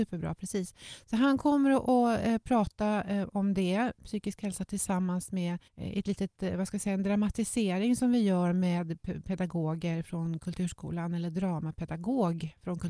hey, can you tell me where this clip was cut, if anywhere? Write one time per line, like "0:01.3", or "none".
0:05.7